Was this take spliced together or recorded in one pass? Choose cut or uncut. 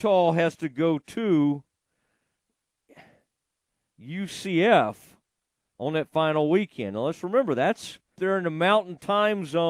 cut